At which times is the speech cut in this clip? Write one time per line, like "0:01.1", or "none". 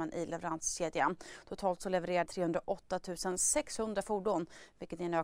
0:02.3